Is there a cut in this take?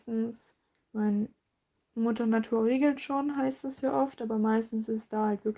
no; 0 cuts

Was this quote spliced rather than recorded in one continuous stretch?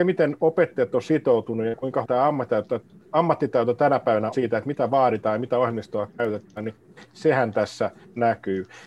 yes; 2 cuts; at 2.0 s, 4.3 s

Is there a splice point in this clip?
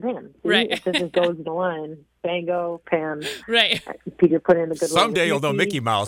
yes; 3 cuts; at 1.1 s, 1.4 s, 2.8 s

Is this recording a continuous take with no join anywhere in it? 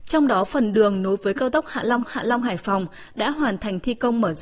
no; 1 cut; at 2.0 s

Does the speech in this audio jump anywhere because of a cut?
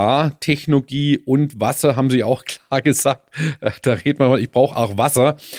no; 0 cuts

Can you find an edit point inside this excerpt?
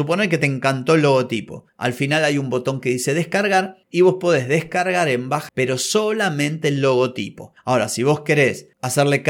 yes; 1 cut; at 5.5 s

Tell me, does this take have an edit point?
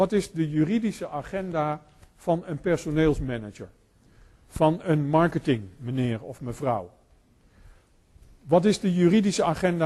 no; 0 cuts

